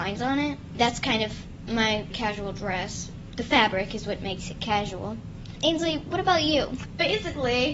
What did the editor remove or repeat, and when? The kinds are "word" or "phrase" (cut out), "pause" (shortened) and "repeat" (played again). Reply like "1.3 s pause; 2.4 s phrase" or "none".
none